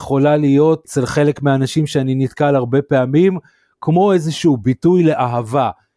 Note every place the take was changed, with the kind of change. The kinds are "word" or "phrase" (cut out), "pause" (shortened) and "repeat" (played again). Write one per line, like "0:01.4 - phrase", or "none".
none